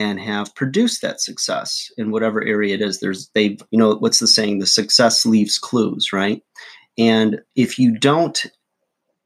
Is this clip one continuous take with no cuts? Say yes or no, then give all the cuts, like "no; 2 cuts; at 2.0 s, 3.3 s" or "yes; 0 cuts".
no; 2 cuts; at 3.7 s, 7.5 s